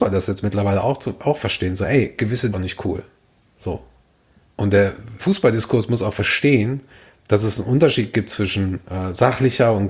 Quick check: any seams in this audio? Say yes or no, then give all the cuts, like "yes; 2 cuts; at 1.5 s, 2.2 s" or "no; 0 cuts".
yes; 2 cuts; at 2.5 s, 5.2 s